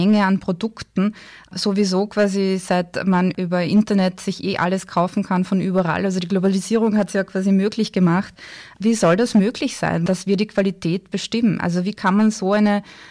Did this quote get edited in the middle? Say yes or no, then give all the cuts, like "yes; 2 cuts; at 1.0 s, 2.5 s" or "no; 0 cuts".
no; 0 cuts